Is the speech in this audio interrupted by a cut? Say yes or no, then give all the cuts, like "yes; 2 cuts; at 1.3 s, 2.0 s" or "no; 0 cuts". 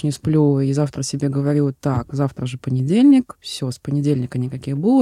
no; 0 cuts